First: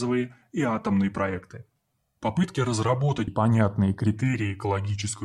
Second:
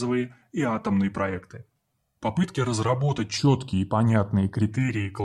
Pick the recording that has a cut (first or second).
first